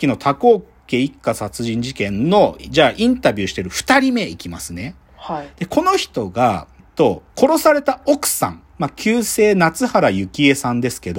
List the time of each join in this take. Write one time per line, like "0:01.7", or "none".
0:06.8
0:07.3
0:08.7

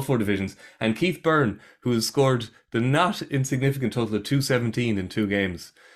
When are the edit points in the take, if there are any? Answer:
none

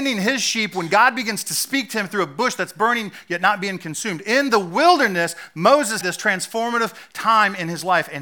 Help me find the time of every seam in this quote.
0:06.0

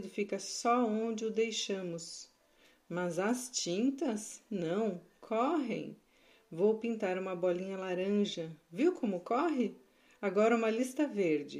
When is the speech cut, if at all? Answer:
none

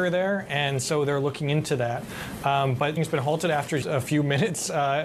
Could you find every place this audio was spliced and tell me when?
0:03.0
0:03.8

